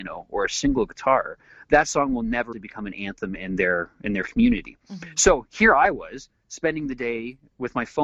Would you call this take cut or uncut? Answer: cut